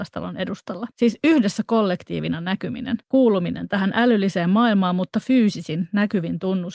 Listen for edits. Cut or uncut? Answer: cut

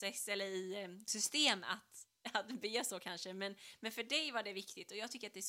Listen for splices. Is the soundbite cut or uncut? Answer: uncut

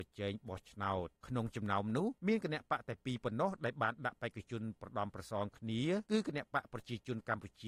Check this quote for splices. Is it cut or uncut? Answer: cut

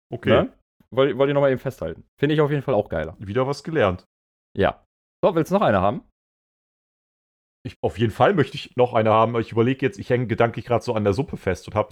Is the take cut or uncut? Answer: cut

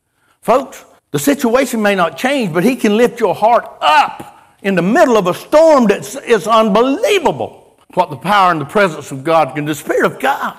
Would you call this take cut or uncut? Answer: cut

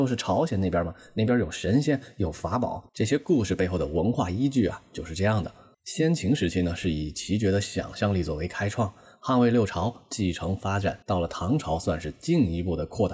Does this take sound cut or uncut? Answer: cut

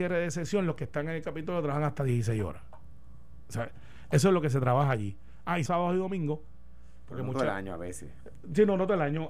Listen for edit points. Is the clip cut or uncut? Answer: cut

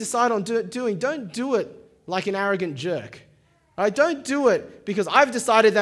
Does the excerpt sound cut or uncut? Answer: uncut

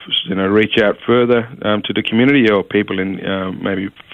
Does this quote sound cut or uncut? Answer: uncut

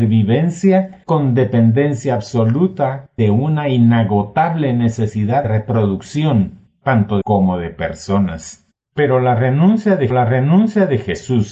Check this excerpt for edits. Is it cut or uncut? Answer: cut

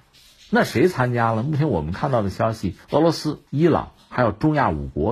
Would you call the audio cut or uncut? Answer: cut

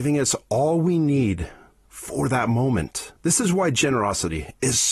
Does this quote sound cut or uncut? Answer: cut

